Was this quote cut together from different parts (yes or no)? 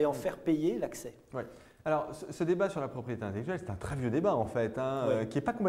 no